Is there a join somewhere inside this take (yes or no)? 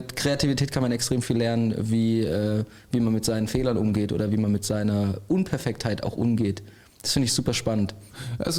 no